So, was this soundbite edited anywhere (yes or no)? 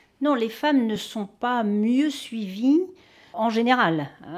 no